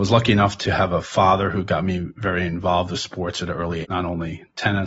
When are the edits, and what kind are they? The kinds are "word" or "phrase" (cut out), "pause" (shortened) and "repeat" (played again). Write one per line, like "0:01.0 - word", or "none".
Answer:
0:03.8 - word